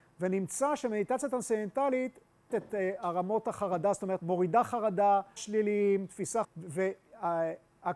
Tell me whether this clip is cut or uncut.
cut